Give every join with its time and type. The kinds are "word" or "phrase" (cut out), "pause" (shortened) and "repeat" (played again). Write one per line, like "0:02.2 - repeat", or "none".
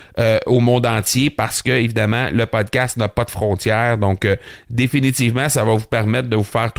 none